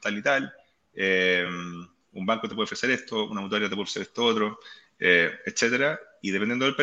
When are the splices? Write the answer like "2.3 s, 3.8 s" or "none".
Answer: none